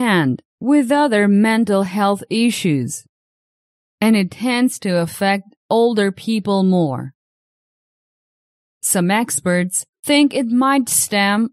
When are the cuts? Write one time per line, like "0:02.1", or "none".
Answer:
none